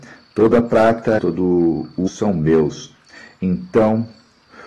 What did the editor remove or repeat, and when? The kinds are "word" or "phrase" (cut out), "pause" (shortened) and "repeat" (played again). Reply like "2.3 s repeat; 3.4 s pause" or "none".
1.2 s word; 2.1 s phrase